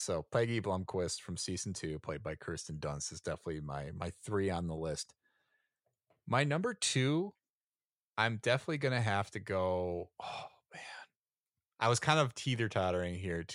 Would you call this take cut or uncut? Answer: uncut